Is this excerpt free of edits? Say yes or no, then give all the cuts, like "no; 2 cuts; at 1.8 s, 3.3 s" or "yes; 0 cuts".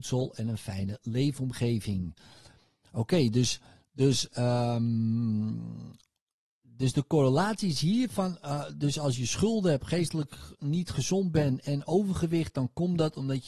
yes; 0 cuts